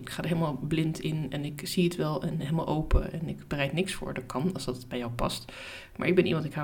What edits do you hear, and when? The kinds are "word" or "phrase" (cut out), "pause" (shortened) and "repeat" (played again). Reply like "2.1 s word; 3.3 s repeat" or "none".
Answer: none

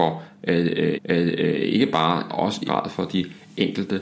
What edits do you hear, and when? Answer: 0.9 s repeat; 2.3 s phrase; 2.7 s word

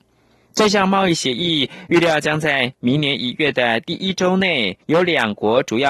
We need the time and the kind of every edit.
4.8 s pause

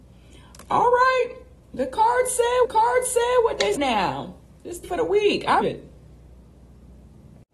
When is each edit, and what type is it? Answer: 1.6 s pause; 2.6 s repeat; 3.7 s word; 4.8 s word; 5.6 s word

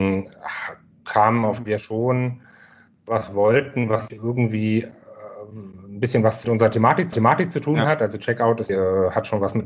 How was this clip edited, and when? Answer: 1.7 s phrase; 4.1 s word; 6.4 s word; 7.1 s repeat; 8.7 s phrase

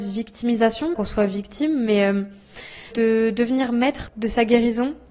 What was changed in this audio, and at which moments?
0.9 s word; 2.9 s word; 4.1 s word

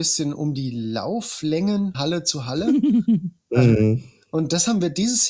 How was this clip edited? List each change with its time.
1.9 s word

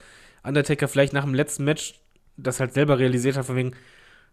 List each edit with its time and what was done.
none

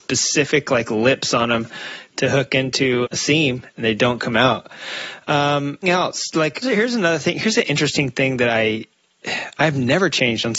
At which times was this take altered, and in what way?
3.0 s word; 5.8 s word; 6.6 s word

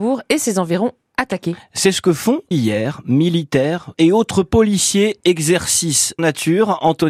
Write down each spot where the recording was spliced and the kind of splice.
2.5 s word; 3.9 s word; 6.2 s word

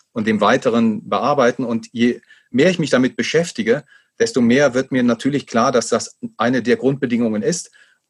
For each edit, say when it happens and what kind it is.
none

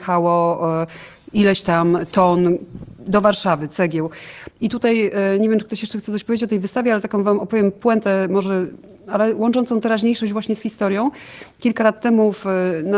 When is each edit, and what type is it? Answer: none

